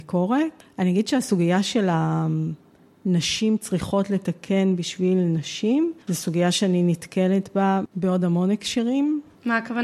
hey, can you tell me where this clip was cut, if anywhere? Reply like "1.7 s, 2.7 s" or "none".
none